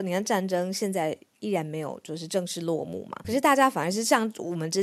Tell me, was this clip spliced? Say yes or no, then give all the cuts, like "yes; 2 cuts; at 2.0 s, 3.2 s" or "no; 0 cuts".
yes; 1 cut; at 3.2 s